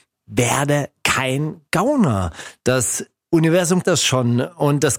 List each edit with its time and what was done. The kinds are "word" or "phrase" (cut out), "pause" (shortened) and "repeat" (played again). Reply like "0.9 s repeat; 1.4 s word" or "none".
3.8 s word